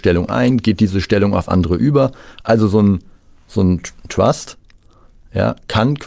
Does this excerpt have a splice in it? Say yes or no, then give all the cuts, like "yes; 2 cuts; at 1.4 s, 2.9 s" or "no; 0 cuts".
yes; 1 cut; at 4.1 s